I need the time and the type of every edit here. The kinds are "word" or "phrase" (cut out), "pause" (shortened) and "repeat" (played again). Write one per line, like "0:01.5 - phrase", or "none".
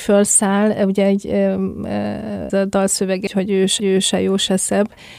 0:02.5 - word
0:03.3 - word
0:03.8 - repeat